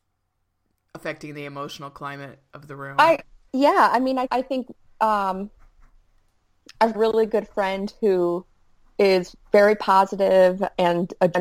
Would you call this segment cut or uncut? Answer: cut